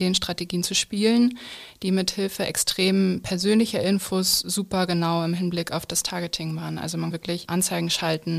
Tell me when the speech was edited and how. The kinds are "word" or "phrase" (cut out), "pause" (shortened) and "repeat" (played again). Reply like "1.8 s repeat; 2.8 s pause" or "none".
7.1 s word